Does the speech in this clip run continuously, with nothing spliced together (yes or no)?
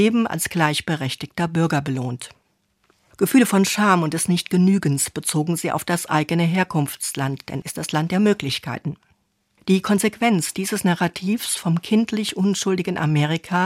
no